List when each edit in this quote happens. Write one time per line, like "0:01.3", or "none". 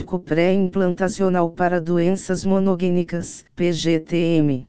0:03.5